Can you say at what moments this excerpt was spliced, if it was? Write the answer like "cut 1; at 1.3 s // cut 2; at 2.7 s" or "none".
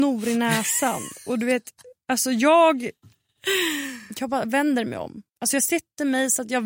cut 1; at 5.3 s